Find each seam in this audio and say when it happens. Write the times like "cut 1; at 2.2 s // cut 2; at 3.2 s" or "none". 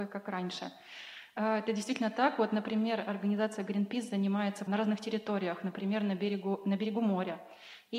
cut 1; at 4.7 s

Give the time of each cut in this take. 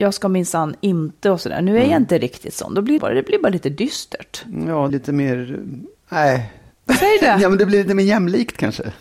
cut 1; at 3.0 s // cut 2; at 4.9 s // cut 3; at 6.0 s

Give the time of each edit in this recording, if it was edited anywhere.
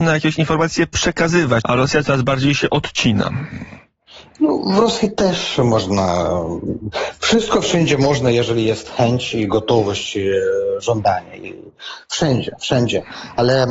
cut 1; at 1.6 s

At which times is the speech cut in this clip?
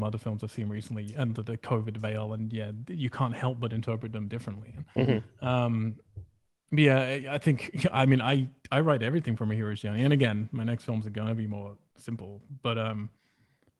cut 1; at 6.5 s

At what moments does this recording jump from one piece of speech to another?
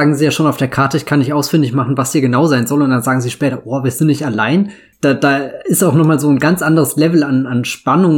cut 1; at 4.9 s

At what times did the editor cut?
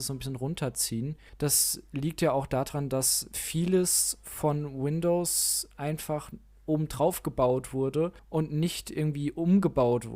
none

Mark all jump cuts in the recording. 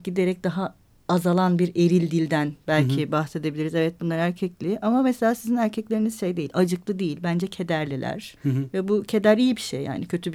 cut 1; at 8.4 s

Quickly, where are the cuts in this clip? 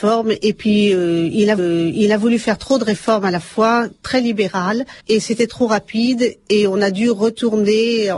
cut 1; at 1.6 s // cut 2; at 5.0 s

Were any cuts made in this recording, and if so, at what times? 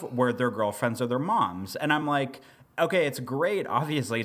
none

